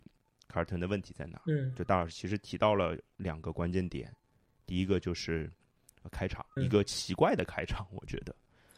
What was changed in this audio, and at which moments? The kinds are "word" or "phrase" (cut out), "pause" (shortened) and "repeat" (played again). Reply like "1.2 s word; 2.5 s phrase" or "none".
6.6 s word